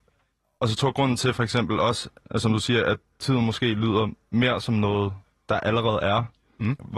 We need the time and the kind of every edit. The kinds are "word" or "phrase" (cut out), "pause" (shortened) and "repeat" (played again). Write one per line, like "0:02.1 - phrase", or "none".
none